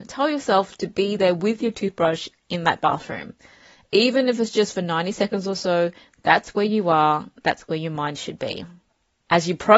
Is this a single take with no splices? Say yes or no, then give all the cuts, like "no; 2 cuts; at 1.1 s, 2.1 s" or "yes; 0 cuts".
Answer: yes; 0 cuts